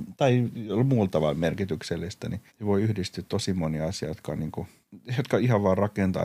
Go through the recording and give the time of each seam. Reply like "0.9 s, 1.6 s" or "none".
2.5 s